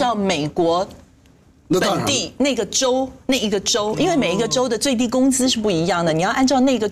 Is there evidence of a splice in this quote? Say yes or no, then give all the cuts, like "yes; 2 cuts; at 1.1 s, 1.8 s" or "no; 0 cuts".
no; 0 cuts